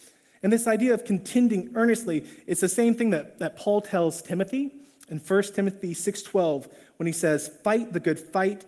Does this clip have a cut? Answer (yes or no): no